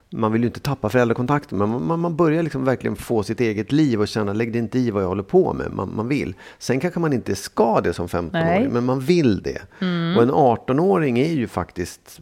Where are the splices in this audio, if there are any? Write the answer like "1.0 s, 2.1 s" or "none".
none